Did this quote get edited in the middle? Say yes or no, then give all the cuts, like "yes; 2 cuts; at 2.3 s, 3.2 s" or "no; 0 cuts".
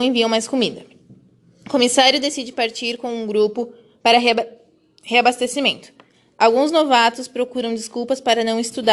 no; 0 cuts